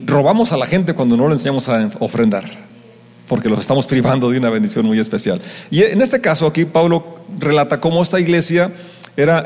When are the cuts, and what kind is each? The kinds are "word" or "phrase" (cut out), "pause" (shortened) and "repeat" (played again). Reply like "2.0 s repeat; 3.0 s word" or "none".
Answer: none